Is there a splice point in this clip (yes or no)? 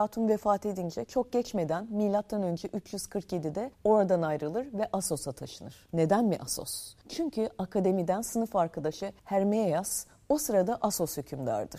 yes